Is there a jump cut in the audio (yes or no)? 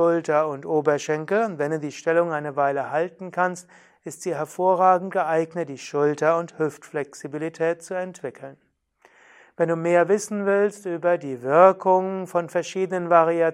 no